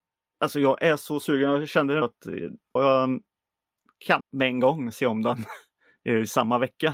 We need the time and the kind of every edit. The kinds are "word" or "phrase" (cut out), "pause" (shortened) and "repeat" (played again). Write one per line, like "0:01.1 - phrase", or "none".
0:02.0 - word
0:02.8 - word
0:04.2 - word